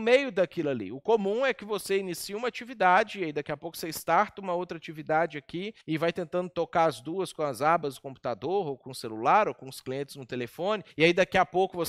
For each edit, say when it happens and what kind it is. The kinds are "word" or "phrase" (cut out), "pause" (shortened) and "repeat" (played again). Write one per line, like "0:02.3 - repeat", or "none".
0:05.8 - pause
0:10.9 - pause